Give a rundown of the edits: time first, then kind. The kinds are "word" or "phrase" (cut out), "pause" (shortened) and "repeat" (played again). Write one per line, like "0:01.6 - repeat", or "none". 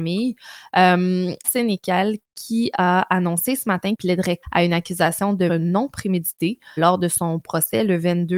0:01.4 - word
0:03.9 - word
0:04.4 - word
0:05.5 - word
0:06.8 - word